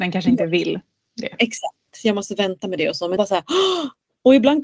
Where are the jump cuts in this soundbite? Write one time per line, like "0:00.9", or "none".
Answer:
0:03.2